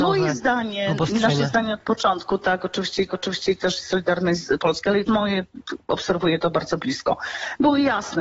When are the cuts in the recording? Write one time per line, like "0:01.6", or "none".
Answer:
0:03.1
0:05.1